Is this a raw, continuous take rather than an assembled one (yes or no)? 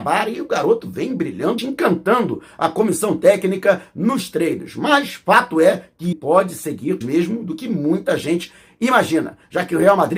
no